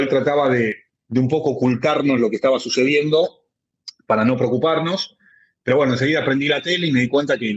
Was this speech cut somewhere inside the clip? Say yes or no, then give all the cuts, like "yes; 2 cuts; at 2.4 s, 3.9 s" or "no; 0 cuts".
no; 0 cuts